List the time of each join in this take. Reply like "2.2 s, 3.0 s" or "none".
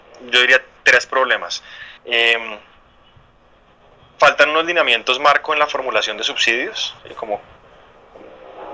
2.0 s, 7.0 s